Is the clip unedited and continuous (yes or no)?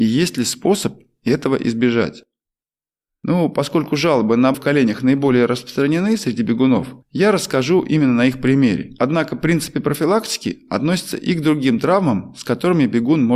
no